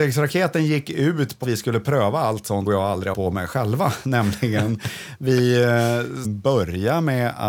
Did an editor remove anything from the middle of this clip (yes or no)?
yes